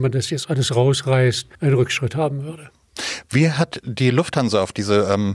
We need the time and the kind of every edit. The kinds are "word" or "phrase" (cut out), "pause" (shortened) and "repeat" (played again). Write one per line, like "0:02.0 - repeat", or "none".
0:01.5 - pause